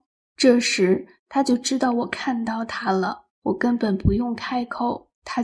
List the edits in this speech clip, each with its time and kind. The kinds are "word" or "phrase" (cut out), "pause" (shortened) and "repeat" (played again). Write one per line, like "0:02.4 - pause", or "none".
0:03.3 - pause